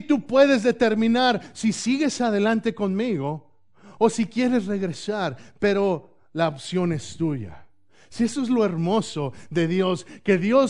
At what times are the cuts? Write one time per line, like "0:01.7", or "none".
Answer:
none